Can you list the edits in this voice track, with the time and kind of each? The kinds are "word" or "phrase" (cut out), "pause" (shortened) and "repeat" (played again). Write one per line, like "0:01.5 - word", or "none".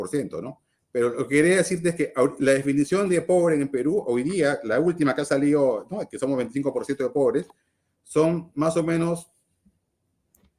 none